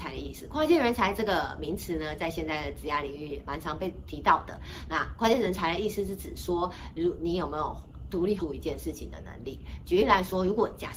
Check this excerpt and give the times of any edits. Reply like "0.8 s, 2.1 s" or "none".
3.4 s, 8.4 s